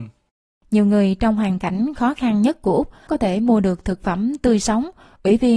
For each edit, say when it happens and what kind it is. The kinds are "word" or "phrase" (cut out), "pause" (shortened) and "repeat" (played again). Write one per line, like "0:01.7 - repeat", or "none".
0:03.1 - word